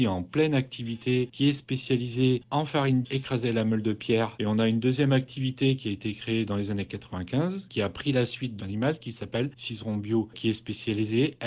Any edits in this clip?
yes; 3 cuts; at 3.0 s, 6.5 s, 8.6 s

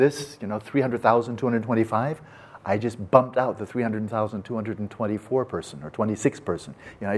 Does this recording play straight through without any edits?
yes; 0 cuts

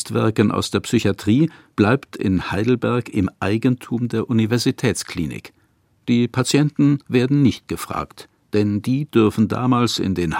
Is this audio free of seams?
yes; 0 cuts

